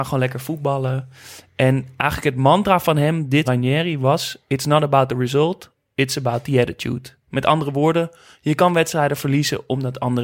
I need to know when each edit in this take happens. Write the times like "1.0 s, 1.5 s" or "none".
3.4 s